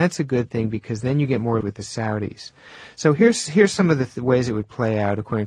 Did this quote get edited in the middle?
yes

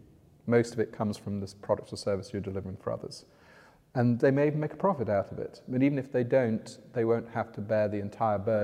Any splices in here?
no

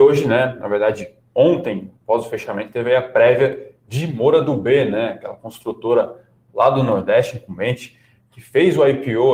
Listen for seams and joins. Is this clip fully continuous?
no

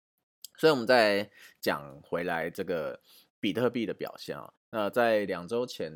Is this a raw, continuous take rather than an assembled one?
yes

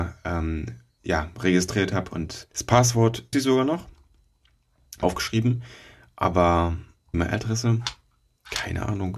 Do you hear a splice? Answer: yes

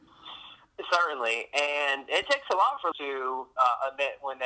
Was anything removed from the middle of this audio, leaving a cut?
yes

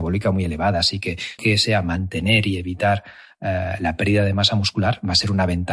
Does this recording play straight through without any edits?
no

